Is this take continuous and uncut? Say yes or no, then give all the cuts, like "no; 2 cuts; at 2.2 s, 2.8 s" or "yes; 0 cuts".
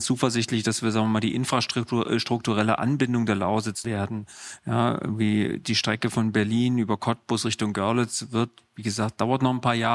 no; 1 cut; at 3.8 s